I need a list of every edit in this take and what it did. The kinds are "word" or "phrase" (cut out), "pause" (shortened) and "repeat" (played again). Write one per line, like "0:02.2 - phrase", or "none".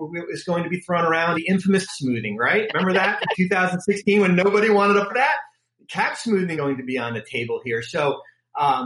0:01.3 - word
0:01.9 - word
0:05.1 - word
0:06.5 - word